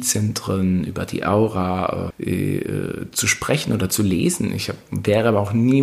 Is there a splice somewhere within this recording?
yes; 1 cut; at 2.1 s

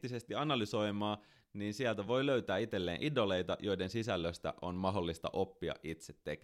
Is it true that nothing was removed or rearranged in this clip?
yes; 0 cuts

